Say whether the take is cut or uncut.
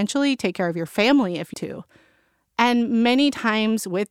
cut